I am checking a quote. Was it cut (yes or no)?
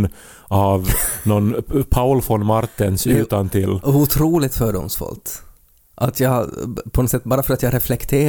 no